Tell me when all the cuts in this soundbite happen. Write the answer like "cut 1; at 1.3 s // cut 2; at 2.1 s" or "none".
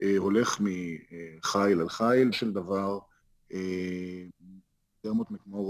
cut 1; at 2.3 s